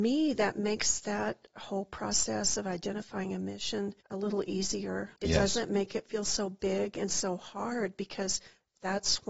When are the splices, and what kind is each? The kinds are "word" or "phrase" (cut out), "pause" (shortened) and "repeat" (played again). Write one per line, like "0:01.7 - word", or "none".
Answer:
0:04.0 - pause
0:05.2 - pause